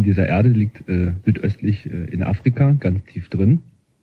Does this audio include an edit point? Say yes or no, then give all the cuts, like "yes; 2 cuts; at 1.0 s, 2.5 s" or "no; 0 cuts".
no; 0 cuts